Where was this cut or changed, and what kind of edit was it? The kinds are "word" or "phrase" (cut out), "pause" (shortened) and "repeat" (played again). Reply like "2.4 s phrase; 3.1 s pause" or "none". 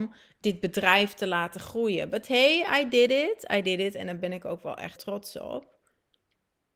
5.0 s word